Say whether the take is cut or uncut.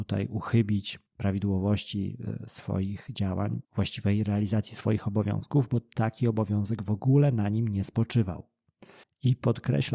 cut